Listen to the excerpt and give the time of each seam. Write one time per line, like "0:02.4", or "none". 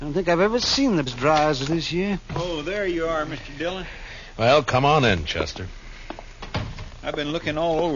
0:01.1
0:01.7